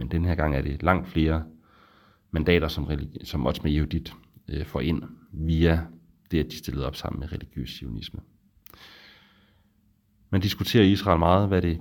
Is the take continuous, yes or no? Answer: yes